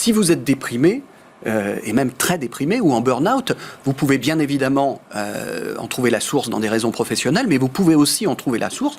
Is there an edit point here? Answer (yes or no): no